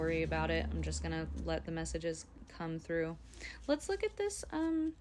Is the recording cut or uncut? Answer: uncut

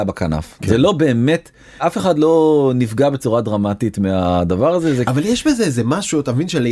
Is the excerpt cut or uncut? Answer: uncut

